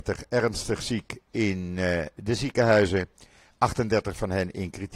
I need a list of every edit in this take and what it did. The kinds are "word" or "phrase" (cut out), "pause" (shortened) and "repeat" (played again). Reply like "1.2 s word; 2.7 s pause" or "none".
none